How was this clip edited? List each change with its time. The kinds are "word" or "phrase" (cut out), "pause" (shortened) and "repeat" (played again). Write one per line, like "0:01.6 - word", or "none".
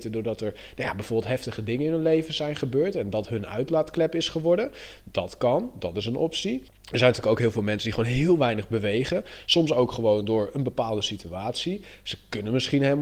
0:06.7 - pause